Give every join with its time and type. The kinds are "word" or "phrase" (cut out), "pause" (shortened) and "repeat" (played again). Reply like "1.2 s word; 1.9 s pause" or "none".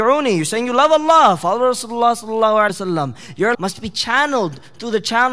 2.7 s word; 3.5 s word